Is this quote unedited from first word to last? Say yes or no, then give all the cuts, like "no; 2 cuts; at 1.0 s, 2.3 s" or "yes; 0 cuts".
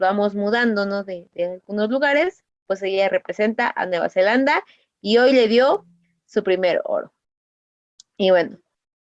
yes; 0 cuts